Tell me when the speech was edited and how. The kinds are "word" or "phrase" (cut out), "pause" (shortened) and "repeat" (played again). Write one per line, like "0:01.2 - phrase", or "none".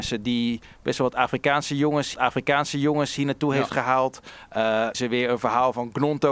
0:02.1 - repeat
0:04.9 - phrase